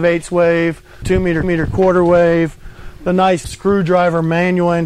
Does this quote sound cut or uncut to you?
cut